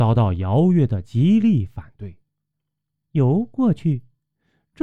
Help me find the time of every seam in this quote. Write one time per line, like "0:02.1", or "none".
none